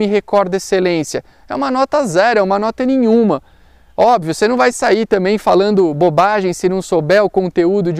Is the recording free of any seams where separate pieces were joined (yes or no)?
yes